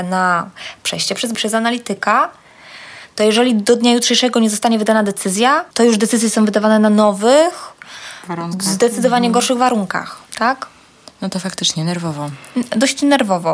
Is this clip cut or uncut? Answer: cut